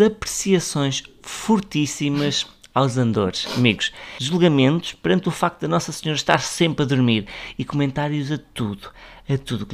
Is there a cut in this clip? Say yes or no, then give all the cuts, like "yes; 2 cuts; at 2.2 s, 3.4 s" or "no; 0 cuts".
no; 0 cuts